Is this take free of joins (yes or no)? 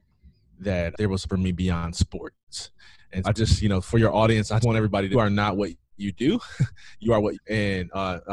no